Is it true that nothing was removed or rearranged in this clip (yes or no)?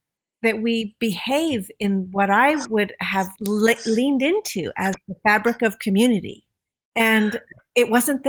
no